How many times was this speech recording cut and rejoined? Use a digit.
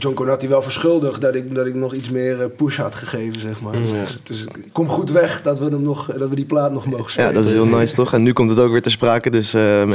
0